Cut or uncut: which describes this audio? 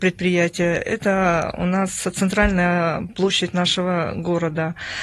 uncut